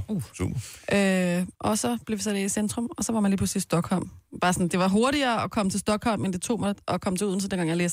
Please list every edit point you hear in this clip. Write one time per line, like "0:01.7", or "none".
0:01.5